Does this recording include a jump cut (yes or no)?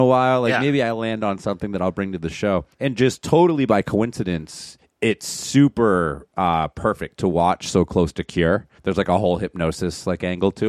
yes